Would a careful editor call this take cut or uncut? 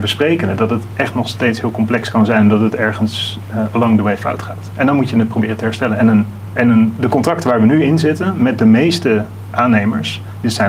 uncut